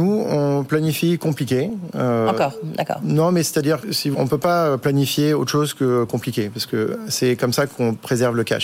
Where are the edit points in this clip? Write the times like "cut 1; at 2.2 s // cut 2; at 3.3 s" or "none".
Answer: cut 1; at 3.8 s // cut 2; at 4.1 s